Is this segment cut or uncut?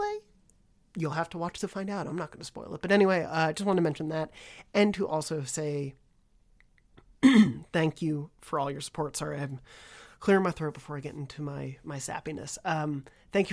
uncut